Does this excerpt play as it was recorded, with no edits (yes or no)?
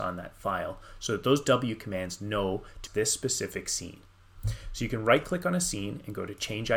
no